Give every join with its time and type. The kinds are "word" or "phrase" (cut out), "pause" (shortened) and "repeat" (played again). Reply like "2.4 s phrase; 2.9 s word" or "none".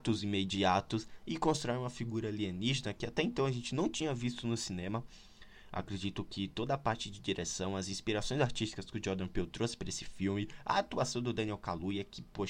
none